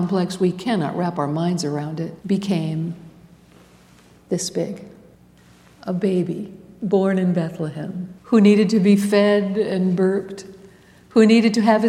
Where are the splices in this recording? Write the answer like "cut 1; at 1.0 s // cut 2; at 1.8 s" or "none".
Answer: cut 1; at 2.2 s // cut 2; at 5.1 s // cut 3; at 8.2 s

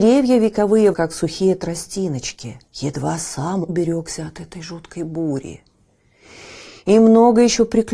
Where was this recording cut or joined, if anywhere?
cut 1; at 0.9 s // cut 2; at 2.7 s // cut 3; at 3.7 s

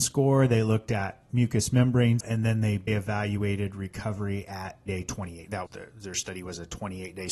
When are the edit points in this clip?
cut 1; at 2.2 s // cut 2; at 2.9 s // cut 3; at 4.9 s // cut 4; at 5.7 s

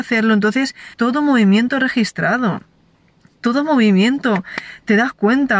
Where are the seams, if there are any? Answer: cut 1; at 0.9 s

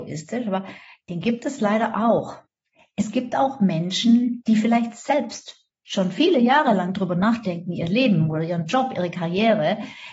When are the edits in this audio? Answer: none

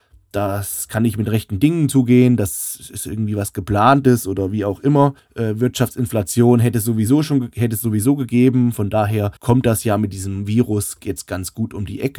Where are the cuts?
cut 1; at 5.2 s // cut 2; at 9.4 s

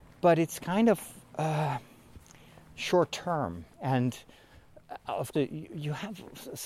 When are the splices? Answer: cut 1; at 3.7 s // cut 2; at 5.3 s

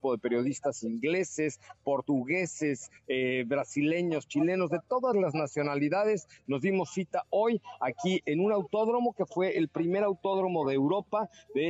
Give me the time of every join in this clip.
none

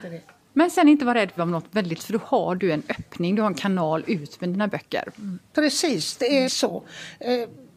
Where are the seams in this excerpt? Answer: cut 1; at 1.4 s // cut 2; at 2.0 s // cut 3; at 6.5 s

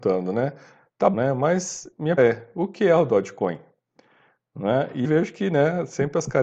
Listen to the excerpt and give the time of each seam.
cut 1; at 1.1 s // cut 2; at 2.2 s // cut 3; at 5.0 s

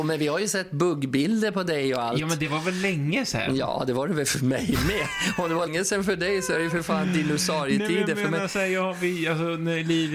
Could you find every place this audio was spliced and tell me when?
cut 1; at 5.7 s

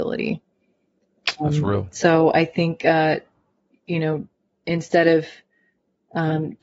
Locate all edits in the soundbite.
none

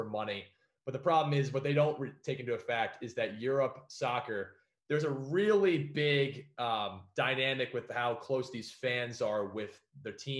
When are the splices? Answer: none

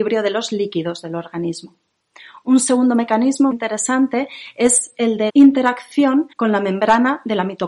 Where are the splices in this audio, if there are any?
cut 1; at 3.5 s // cut 2; at 5.3 s // cut 3; at 6.3 s

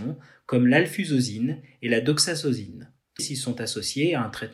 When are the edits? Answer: cut 1; at 3.2 s

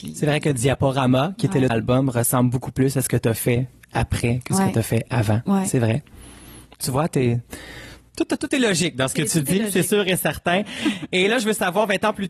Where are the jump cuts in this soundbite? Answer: cut 1; at 1.7 s

